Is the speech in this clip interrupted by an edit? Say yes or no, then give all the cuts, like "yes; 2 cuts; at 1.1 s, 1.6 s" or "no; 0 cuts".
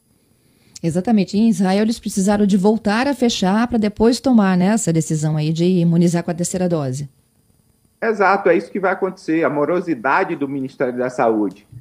no; 0 cuts